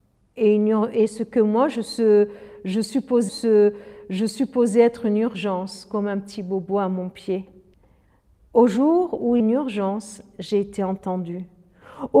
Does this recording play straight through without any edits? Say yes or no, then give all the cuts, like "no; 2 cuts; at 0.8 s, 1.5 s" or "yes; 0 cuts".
no; 3 cuts; at 3.3 s, 7.7 s, 9.4 s